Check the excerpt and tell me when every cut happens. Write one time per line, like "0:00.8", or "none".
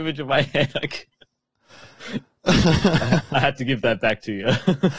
none